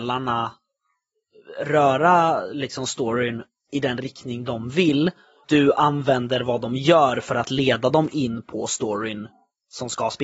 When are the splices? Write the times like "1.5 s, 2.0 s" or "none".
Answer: 5.4 s